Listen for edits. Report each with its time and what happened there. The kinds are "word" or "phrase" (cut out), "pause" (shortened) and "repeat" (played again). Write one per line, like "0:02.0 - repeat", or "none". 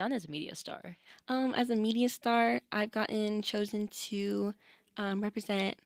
none